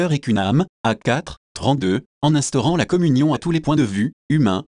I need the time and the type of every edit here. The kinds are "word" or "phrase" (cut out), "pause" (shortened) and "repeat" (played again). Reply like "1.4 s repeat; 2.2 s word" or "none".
none